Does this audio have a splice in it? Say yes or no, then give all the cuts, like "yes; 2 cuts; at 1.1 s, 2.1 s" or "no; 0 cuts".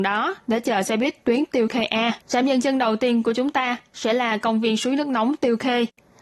yes; 1 cut; at 2.2 s